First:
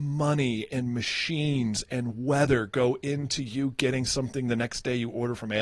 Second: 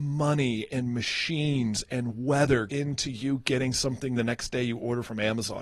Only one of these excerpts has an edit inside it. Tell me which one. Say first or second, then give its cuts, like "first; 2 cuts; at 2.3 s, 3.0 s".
second; 1 cut; at 2.7 s